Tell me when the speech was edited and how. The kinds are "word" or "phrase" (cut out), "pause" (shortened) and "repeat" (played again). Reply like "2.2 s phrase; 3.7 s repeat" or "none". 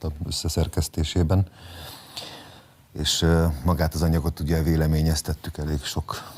none